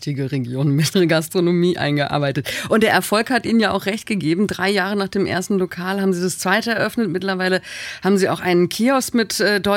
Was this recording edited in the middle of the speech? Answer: yes; 1 cut; at 0.9 s

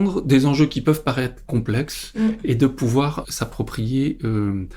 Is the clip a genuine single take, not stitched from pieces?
no; 1 cut; at 3.2 s

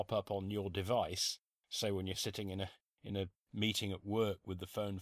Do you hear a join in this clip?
no; 0 cuts

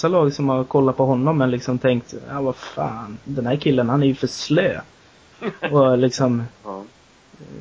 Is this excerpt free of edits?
yes; 0 cuts

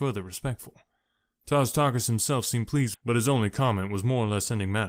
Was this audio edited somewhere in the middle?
yes; 1 cut; at 2.9 s

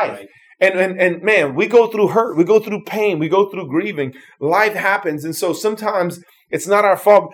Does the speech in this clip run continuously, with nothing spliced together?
yes; 0 cuts

